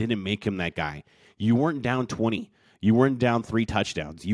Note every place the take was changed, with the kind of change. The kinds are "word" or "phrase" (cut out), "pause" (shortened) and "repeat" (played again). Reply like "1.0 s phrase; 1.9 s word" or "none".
none